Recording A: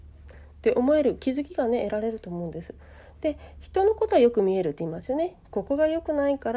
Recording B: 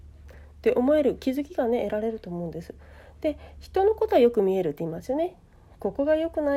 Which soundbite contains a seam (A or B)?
A